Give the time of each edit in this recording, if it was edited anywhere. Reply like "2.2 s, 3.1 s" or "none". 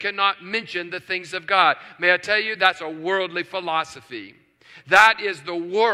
none